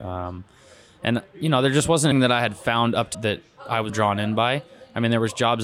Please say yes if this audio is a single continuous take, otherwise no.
no